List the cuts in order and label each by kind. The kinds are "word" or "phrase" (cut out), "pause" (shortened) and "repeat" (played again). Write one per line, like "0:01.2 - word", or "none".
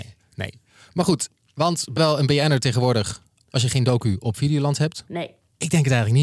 0:02.0 - word